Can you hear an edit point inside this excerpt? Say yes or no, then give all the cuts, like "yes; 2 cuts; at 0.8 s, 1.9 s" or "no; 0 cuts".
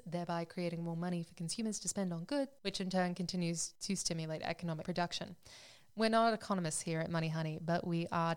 no; 0 cuts